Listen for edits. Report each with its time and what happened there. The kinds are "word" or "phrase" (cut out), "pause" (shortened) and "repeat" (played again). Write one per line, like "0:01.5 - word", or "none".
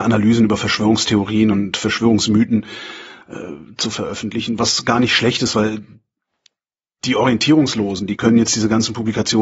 none